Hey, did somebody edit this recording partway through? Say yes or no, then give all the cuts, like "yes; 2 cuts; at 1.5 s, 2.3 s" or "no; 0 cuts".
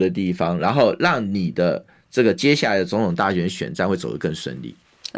no; 0 cuts